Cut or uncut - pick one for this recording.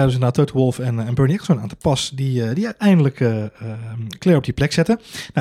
uncut